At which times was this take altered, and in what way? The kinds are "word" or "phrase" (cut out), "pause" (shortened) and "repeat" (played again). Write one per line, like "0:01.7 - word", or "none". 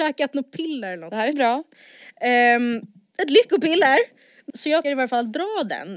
0:01.3 - word
0:04.5 - word
0:04.8 - word